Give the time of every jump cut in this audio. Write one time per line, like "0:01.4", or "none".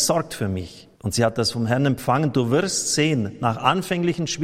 0:00.9